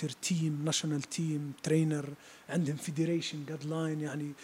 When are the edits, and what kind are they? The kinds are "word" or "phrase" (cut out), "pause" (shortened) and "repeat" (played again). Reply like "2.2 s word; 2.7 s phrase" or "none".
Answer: none